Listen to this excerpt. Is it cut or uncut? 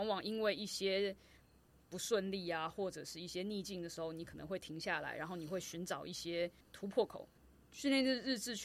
cut